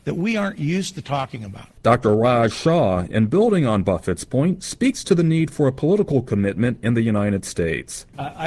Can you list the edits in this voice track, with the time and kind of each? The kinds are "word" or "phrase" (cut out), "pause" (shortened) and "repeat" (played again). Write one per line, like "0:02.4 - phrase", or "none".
none